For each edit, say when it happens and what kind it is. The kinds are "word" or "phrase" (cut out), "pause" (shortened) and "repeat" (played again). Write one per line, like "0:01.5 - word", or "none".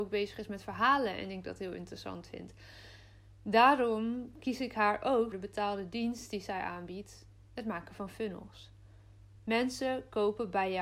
0:05.3 - word